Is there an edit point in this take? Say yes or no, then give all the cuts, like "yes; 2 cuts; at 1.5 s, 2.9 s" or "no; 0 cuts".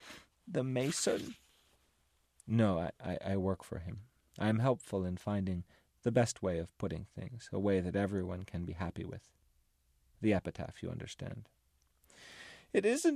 no; 0 cuts